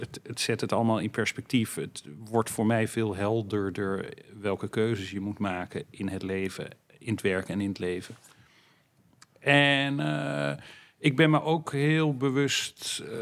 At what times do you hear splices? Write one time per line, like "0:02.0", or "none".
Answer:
none